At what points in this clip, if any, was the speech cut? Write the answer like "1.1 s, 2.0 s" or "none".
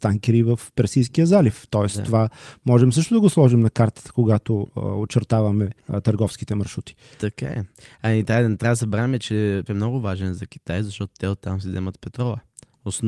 5.8 s, 9.7 s